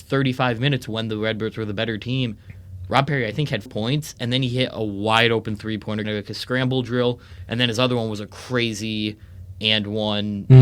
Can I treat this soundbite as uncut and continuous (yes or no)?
no